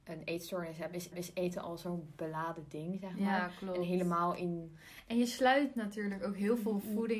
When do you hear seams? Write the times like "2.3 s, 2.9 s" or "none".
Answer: 1.1 s